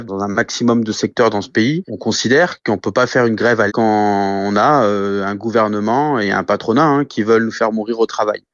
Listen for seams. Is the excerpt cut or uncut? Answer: cut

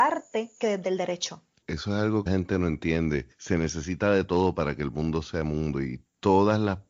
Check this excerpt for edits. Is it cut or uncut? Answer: cut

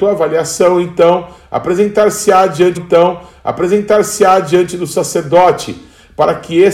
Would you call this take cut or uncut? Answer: cut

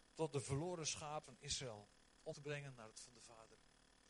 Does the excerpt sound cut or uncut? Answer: cut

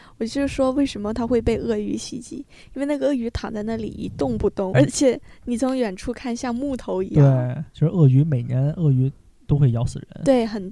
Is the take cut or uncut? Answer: cut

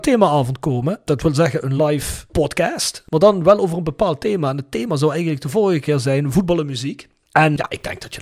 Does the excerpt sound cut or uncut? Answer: uncut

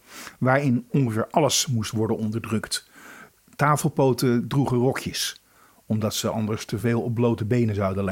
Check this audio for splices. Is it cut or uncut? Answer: uncut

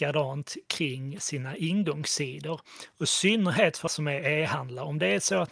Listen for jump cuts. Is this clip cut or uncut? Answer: cut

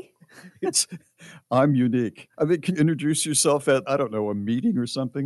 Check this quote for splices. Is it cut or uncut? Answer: cut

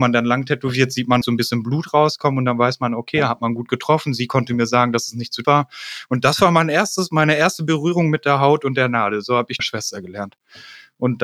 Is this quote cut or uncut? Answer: cut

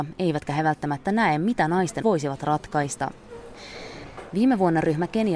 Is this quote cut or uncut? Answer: cut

